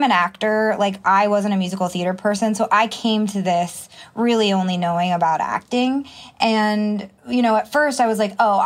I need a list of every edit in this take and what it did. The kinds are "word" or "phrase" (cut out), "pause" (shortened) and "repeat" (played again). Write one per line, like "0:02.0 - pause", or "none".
0:07.2 - pause